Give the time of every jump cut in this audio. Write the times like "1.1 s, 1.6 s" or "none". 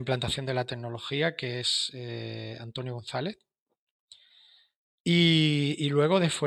none